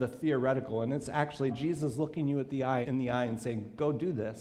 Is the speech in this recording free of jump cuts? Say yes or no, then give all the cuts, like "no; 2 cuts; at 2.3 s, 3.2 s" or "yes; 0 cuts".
no; 2 cuts; at 1.5 s, 2.8 s